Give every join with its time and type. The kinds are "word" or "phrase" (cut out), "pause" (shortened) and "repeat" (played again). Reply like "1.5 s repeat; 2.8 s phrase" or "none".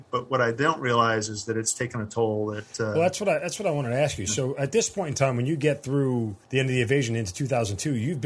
6.4 s pause